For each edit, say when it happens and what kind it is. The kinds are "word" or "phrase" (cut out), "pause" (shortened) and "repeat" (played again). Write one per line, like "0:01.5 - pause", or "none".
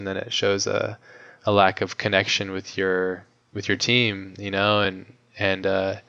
none